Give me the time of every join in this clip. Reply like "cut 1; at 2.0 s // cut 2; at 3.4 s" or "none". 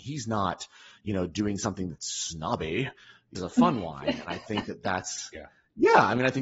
cut 1; at 3.4 s